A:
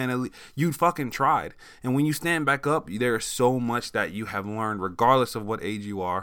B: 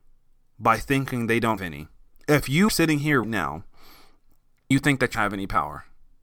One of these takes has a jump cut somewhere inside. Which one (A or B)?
B